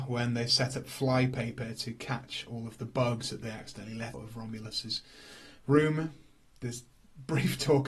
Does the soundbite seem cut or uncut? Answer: cut